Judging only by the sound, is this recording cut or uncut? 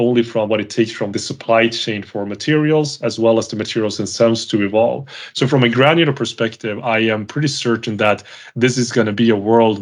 uncut